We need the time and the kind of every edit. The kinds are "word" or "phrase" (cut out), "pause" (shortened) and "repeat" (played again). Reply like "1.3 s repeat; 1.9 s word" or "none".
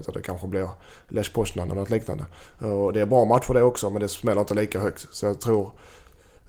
none